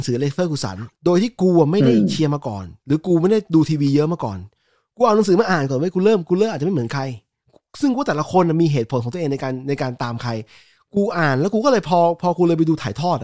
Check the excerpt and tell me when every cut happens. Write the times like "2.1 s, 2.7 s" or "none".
0.9 s, 2.8 s